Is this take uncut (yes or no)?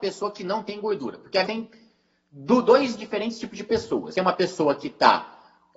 no